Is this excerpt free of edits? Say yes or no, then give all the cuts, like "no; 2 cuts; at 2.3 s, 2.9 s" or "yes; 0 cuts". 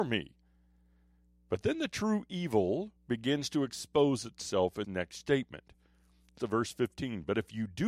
no; 3 cuts; at 3.0 s, 4.8 s, 6.4 s